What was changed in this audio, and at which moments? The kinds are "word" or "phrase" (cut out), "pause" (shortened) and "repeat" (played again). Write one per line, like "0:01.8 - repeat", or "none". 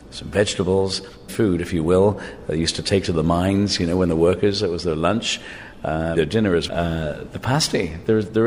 0:01.3 - word
0:06.2 - word
0:06.7 - word